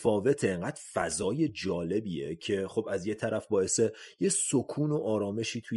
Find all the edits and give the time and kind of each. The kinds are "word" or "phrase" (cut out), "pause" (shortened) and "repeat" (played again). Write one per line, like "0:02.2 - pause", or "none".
none

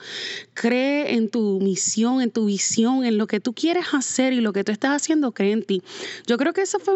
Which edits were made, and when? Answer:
none

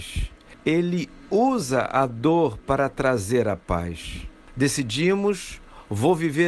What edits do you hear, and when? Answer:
none

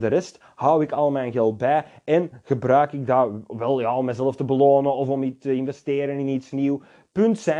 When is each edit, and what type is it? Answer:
none

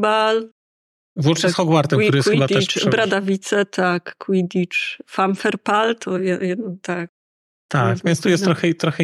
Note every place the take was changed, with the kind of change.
none

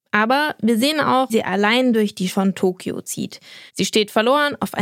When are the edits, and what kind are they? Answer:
0:01.3 - word
0:02.3 - word
0:03.7 - pause

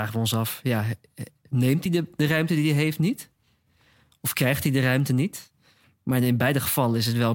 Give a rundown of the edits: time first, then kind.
none

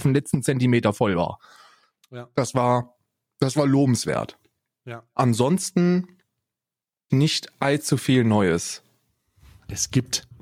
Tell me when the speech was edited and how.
0:07.1 - phrase

